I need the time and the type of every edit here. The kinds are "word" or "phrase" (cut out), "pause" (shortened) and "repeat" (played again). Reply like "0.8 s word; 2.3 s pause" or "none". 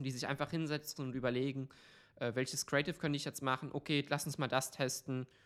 none